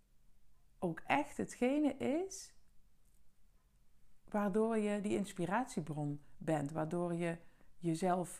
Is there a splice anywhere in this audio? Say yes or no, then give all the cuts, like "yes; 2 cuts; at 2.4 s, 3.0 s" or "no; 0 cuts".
no; 0 cuts